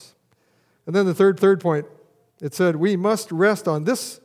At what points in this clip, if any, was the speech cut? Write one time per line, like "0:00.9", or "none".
0:01.4